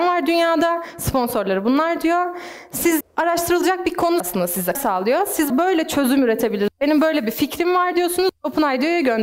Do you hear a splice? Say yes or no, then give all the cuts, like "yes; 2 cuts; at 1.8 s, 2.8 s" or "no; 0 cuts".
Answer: yes; 4 cuts; at 3.0 s, 4.2 s, 4.7 s, 5.5 s